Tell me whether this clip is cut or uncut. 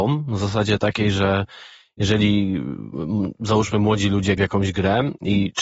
cut